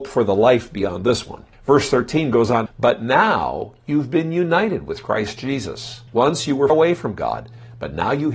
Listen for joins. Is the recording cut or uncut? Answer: cut